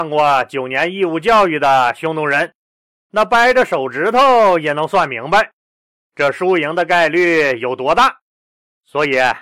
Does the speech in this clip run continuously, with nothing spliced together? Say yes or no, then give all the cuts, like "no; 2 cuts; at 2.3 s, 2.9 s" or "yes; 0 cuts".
yes; 0 cuts